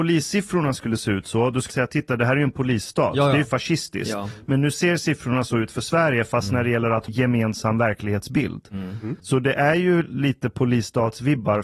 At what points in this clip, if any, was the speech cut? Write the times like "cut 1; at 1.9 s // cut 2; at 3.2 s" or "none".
cut 1; at 1.7 s // cut 2; at 7.1 s // cut 3; at 9.2 s